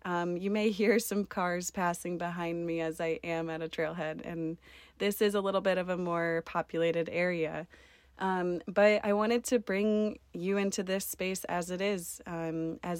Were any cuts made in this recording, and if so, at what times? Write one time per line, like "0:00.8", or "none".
none